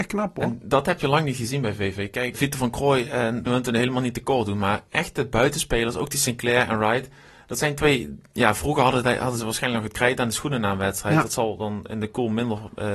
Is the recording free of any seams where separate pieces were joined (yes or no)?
no